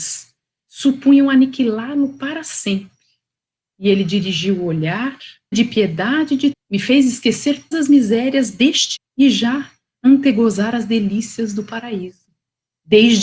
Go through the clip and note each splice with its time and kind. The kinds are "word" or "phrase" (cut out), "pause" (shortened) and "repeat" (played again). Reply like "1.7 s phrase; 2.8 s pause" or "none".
5.5 s word; 6.5 s word; 7.7 s word; 9.0 s word